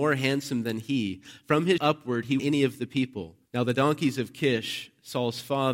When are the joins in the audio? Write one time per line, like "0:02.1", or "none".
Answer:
0:01.8
0:02.4
0:03.5